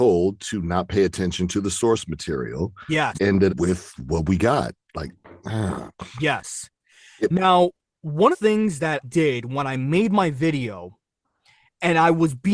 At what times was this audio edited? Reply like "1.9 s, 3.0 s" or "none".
3.1 s, 3.5 s, 8.3 s, 9.0 s